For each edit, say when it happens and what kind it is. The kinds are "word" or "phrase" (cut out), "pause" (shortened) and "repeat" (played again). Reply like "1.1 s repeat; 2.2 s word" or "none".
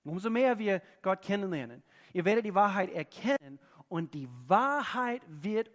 none